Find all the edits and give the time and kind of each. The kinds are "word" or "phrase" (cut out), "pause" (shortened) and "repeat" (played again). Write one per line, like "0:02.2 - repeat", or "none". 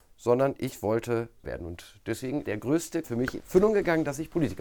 0:01.4 - word
0:02.4 - word
0:03.0 - word
0:03.4 - word